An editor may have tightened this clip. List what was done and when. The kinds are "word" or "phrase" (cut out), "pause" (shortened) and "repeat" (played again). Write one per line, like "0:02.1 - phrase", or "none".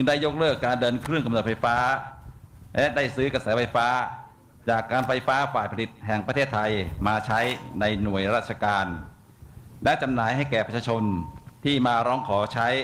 none